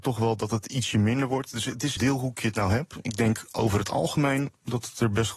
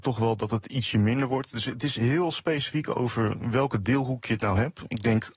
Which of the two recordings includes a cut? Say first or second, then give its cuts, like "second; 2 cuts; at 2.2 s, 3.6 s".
first; 1 cut; at 2.0 s